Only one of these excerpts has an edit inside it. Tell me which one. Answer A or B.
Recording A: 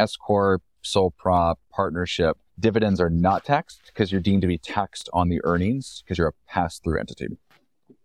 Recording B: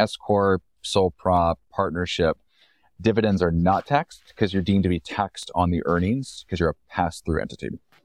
A